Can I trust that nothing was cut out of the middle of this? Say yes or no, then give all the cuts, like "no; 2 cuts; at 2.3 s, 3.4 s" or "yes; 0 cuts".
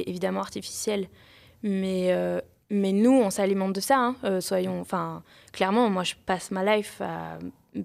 yes; 0 cuts